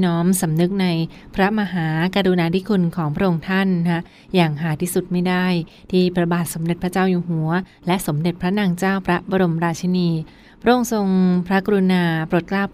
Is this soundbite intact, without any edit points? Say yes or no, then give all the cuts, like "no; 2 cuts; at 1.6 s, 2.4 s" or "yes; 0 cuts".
yes; 0 cuts